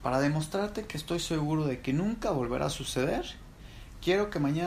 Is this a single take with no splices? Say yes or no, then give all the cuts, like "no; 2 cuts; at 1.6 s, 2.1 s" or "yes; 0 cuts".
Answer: yes; 0 cuts